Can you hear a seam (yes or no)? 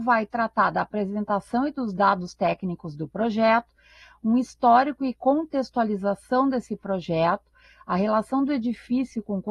no